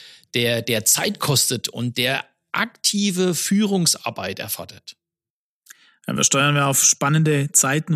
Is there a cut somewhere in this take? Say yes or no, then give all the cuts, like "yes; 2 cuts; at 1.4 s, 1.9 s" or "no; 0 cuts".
no; 0 cuts